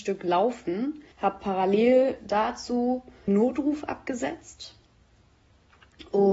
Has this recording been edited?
yes; 2 cuts; at 1.1 s, 3.3 s

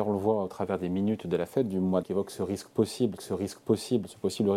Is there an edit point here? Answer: yes; 2 cuts; at 2.0 s, 3.2 s

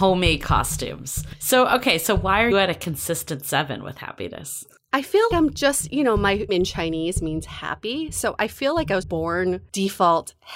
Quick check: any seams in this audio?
yes; 4 cuts; at 2.5 s, 5.3 s, 6.5 s, 9.0 s

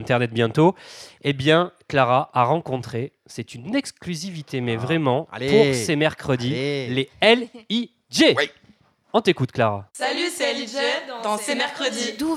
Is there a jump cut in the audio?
yes; 1 cut; at 9.9 s

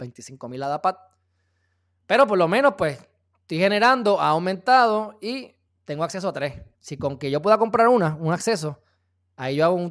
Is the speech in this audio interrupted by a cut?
yes; 2 cuts; at 5.7 s, 6.7 s

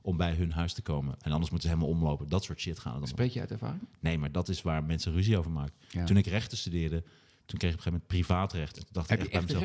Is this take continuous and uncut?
yes; 0 cuts

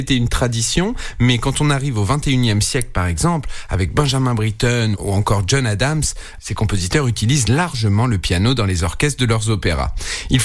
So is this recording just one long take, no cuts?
yes; 0 cuts

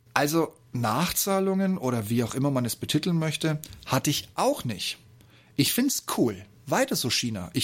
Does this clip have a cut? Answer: no; 0 cuts

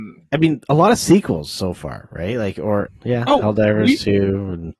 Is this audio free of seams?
no; 1 cut; at 2.9 s

